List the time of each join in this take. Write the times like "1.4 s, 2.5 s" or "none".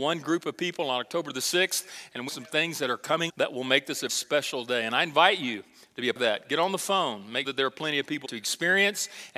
2.3 s, 3.3 s, 4.1 s, 6.2 s, 7.4 s, 8.2 s